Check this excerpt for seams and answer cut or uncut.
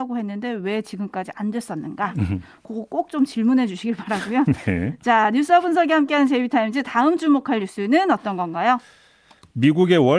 uncut